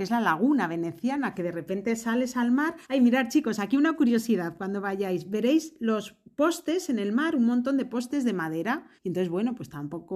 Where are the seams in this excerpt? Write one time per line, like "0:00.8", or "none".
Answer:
0:02.8
0:09.0

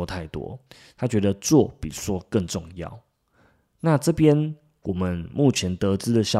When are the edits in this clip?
none

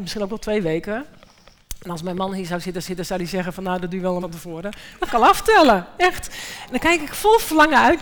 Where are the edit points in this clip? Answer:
0:02.8
0:04.2
0:05.1

